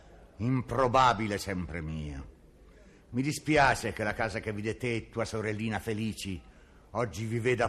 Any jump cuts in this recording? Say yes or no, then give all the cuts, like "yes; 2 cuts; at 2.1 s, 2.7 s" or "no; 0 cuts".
no; 0 cuts